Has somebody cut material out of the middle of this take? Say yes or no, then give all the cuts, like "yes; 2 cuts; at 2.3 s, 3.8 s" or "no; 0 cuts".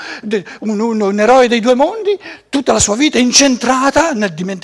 no; 0 cuts